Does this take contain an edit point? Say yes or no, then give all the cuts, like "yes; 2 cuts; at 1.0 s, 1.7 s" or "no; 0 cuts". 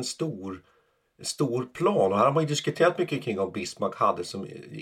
no; 0 cuts